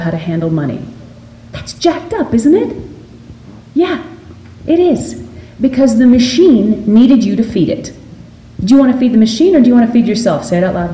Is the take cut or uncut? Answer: uncut